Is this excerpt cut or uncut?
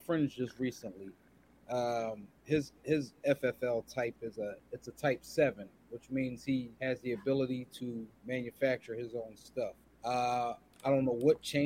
cut